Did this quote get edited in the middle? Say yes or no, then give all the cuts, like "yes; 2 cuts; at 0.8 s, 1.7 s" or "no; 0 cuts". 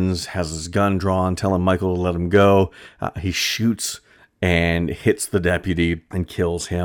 no; 0 cuts